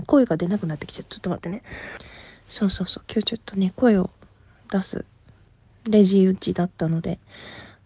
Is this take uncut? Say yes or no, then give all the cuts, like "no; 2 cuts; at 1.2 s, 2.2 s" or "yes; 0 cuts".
yes; 0 cuts